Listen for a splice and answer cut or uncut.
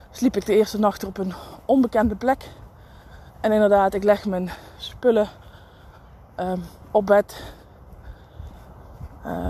cut